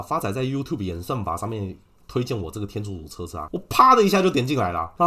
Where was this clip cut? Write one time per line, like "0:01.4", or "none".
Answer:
none